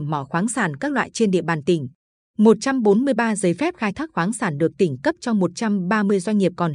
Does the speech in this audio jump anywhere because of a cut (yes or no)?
no